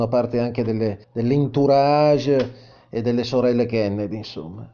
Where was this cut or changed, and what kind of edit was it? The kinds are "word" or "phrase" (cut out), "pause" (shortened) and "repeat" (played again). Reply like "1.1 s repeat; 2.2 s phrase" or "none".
1.0 s pause